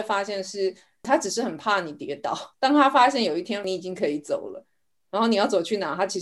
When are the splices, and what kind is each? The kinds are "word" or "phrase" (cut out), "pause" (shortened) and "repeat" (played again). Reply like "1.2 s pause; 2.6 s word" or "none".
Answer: 2.5 s pause